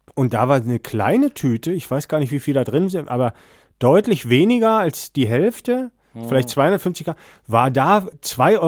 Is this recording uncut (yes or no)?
yes